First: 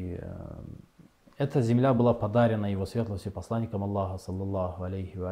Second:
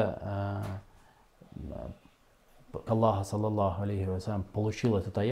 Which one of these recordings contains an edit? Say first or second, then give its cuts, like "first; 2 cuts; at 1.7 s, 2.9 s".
second; 1 cut; at 2.9 s